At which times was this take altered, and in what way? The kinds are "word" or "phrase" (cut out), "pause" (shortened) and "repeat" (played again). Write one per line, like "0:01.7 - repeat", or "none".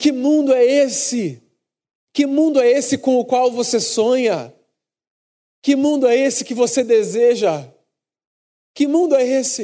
none